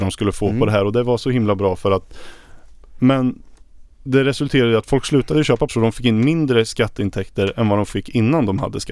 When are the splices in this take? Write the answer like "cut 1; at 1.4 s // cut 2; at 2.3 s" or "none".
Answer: cut 1; at 3.9 s // cut 2; at 5.7 s